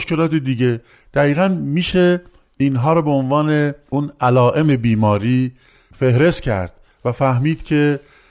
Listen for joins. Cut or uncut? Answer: uncut